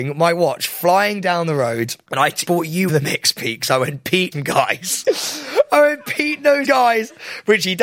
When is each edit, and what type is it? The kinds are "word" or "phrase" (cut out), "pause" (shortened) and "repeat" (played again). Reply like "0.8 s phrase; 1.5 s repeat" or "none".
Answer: 2.5 s word; 2.9 s word; 4.3 s word; 6.6 s word